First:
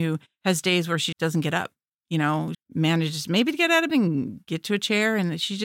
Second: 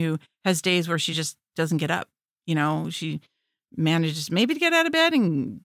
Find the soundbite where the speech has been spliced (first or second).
first